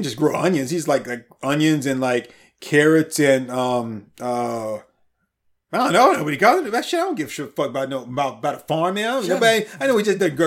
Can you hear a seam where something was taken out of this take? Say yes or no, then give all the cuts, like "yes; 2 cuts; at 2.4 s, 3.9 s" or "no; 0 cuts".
no; 0 cuts